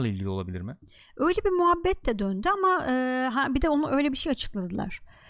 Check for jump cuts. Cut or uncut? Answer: uncut